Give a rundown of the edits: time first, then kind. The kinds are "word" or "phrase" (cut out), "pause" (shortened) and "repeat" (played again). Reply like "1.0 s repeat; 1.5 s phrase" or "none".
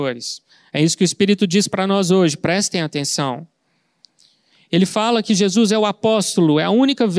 none

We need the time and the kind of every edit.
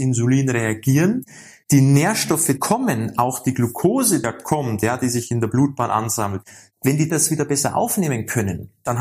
2.6 s word; 4.2 s word; 7.1 s word

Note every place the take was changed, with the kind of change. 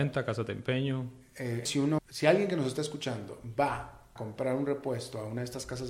1.7 s word; 2.0 s word; 4.2 s word

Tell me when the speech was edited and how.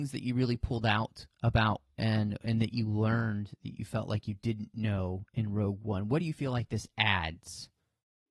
none

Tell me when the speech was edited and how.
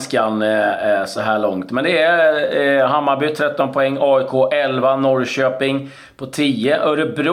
none

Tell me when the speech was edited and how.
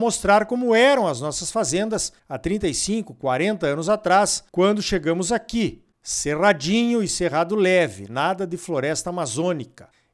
2.2 s pause; 4.5 s pause

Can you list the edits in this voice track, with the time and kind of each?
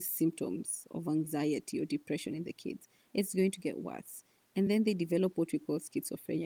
none

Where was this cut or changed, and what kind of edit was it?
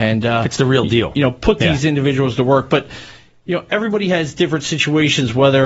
none

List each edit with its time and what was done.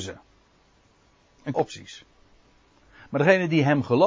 1.5 s phrase

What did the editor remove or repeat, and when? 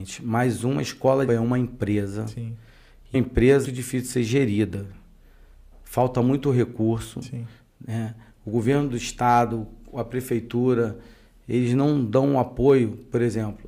1.3 s phrase; 3.1 s word; 3.6 s phrase

